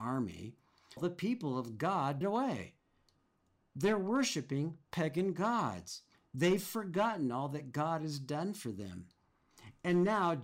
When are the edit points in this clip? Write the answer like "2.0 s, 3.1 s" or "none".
1.0 s, 2.2 s, 6.1 s